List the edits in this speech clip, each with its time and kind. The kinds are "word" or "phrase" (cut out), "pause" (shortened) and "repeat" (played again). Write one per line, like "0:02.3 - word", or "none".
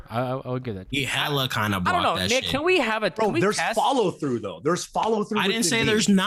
none